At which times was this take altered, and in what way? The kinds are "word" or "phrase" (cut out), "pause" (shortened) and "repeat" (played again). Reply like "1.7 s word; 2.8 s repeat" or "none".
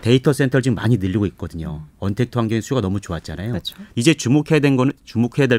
none